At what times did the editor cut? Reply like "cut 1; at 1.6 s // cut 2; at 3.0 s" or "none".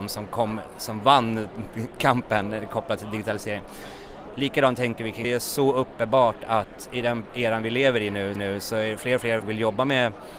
cut 1; at 5.2 s // cut 2; at 8.4 s // cut 3; at 9.4 s